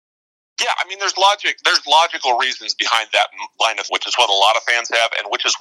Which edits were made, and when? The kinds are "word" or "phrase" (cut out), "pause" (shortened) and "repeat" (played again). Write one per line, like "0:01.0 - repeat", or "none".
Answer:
0:03.9 - word